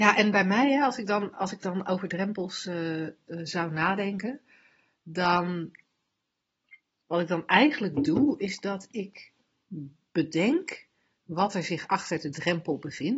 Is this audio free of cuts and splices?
yes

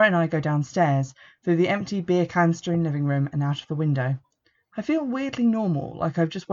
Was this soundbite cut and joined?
no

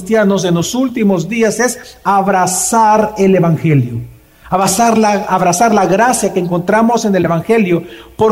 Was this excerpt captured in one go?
yes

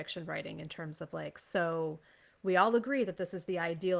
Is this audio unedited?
yes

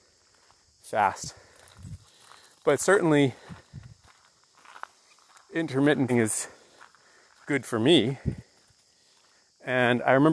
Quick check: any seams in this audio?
yes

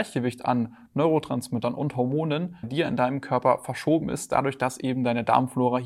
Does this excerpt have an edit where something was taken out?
yes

